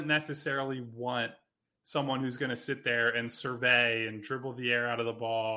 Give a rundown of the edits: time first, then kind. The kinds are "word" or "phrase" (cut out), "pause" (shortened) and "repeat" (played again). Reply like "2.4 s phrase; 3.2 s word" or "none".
none